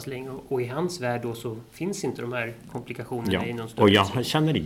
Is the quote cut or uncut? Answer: uncut